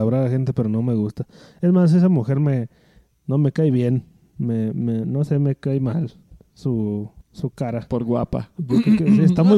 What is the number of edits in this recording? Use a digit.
1